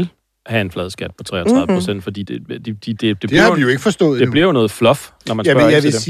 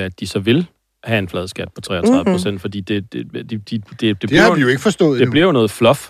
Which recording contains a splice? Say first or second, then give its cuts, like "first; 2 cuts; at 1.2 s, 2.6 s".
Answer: first; 2 cuts; at 2.2 s, 3.0 s